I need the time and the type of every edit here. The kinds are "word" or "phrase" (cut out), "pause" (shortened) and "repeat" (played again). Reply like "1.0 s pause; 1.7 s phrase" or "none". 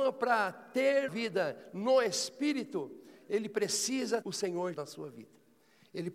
1.1 s word; 4.2 s word; 4.7 s word